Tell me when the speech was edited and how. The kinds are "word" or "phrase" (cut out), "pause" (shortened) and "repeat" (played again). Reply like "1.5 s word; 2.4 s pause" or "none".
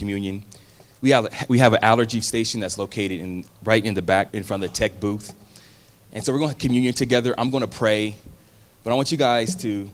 2.2 s word; 3.5 s word; 4.3 s word; 6.6 s word